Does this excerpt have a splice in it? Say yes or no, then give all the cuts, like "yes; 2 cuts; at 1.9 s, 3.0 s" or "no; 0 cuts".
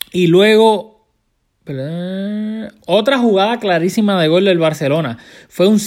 no; 0 cuts